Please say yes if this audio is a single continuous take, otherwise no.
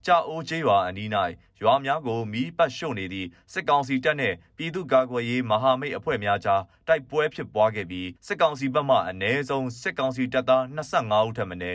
no